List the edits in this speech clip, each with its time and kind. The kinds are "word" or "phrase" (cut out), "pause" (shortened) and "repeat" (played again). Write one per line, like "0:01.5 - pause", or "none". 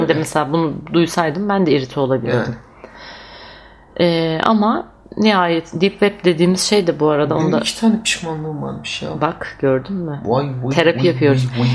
none